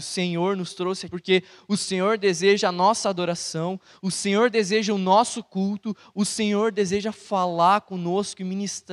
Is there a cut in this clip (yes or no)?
yes